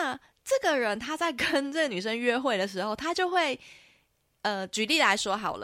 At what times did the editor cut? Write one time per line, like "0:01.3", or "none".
none